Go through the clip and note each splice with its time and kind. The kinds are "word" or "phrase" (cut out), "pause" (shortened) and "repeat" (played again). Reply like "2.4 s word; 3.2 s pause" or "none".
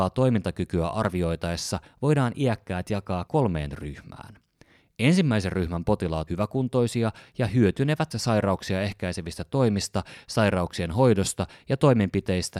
3.3 s word; 6.3 s word; 8.1 s word